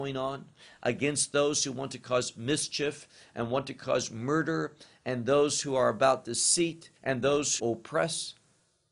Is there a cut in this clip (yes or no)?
yes